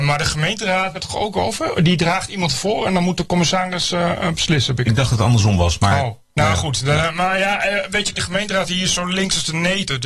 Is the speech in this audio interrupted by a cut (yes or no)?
yes